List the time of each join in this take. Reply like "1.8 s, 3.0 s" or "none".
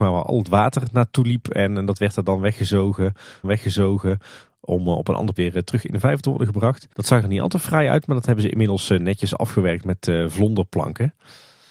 3.4 s, 5.4 s, 6.9 s